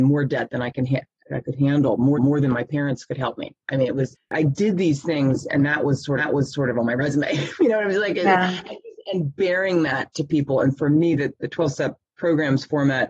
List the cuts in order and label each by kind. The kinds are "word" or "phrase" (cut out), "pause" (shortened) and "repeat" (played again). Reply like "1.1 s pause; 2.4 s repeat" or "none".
2.1 s repeat; 6.2 s repeat